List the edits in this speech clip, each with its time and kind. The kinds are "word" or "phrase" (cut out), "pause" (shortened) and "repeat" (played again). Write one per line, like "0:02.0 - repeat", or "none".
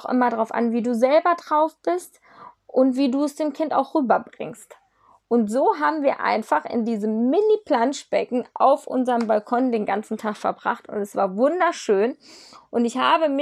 none